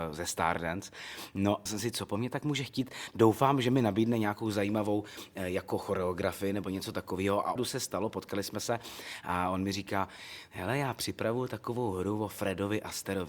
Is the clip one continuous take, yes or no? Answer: no